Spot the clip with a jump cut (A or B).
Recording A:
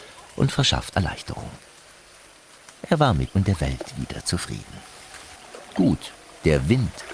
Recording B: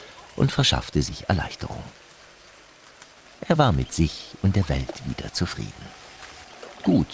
A